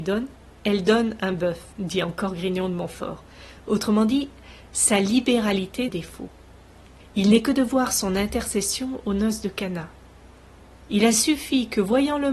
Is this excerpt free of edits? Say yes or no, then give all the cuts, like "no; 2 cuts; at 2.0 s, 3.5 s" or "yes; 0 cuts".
no; 2 cuts; at 1.7 s, 5.9 s